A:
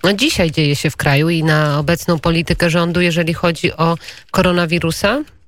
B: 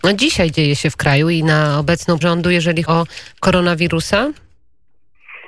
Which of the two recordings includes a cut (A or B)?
B